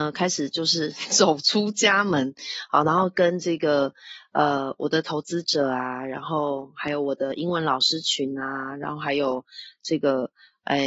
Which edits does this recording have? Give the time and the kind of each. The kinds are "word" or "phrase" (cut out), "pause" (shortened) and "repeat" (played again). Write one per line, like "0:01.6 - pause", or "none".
none